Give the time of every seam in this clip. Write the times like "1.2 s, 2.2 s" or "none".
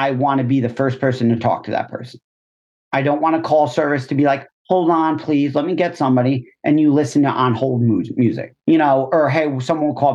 none